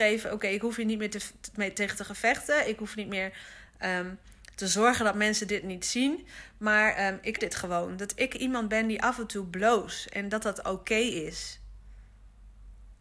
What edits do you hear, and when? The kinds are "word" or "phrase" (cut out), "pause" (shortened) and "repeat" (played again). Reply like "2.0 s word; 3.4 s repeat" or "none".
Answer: 7.4 s word